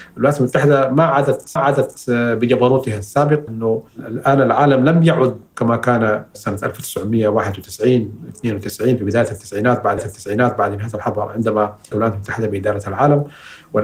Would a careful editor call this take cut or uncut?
cut